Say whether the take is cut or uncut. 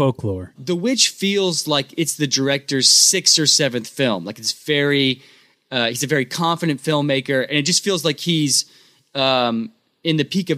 uncut